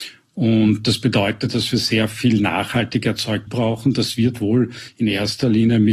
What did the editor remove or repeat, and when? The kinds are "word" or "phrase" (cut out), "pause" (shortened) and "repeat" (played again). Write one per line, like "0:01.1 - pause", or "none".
0:03.5 - word